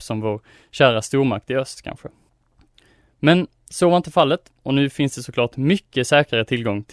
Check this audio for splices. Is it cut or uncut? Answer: uncut